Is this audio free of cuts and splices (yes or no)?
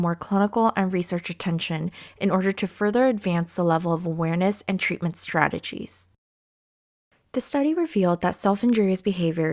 yes